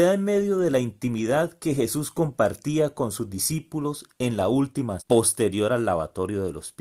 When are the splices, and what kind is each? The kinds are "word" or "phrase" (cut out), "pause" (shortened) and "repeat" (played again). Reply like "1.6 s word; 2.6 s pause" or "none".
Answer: 5.0 s word